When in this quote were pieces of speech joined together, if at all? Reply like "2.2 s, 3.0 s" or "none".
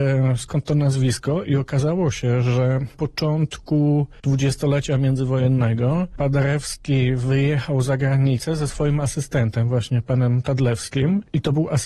2.9 s